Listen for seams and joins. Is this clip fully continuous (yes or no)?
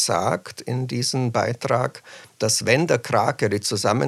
yes